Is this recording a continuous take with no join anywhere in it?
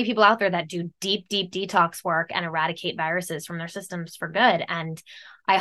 yes; 0 cuts

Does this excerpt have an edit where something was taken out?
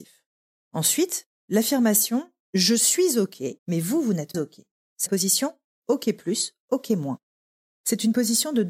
yes; 3 cuts; at 3.6 s, 4.3 s, 5.1 s

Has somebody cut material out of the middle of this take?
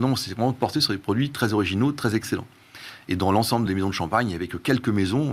no; 0 cuts

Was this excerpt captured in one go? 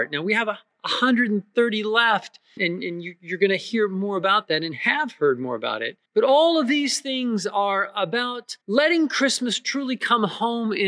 no; 3 cuts; at 2.6 s, 6.1 s, 8.6 s

